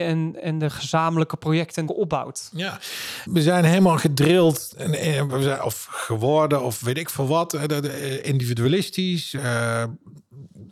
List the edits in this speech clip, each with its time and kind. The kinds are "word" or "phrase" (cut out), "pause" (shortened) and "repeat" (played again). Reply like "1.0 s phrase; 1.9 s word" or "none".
1.9 s word; 3.3 s word